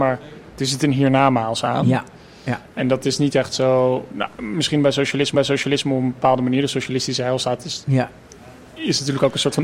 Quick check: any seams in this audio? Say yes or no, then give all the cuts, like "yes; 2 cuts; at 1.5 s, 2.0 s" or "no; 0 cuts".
yes; 1 cut; at 5.3 s